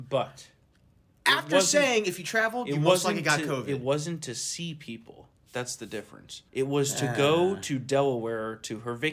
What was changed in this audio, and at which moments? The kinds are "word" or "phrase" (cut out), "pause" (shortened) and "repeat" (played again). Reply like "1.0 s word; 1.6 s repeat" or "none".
6.5 s pause